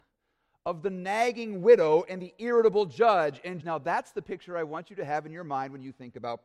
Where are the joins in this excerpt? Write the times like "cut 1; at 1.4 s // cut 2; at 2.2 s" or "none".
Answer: cut 1; at 3.6 s